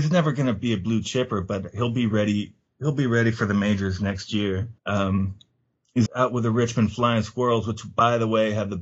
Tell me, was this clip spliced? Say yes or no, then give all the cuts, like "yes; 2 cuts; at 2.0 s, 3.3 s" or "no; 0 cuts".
yes; 2 cuts; at 4.8 s, 6.1 s